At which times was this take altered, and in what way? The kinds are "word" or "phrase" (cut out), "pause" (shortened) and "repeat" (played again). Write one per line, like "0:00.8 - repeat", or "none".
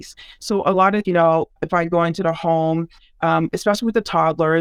0:01.0 - word
0:01.6 - word